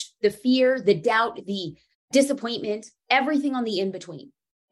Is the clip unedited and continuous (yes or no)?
yes